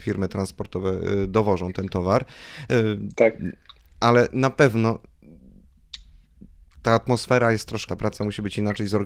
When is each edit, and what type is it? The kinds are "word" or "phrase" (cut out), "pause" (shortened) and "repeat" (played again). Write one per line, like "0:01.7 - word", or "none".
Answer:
0:07.9 - word